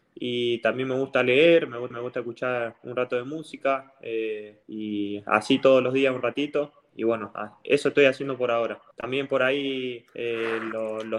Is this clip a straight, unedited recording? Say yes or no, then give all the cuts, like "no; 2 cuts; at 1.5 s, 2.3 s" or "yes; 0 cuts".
no; 5 cuts; at 1.9 s, 4.6 s, 6.9 s, 8.9 s, 10.1 s